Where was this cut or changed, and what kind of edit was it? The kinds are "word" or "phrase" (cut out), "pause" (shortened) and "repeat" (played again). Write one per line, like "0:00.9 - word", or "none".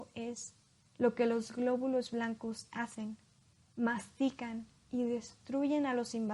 none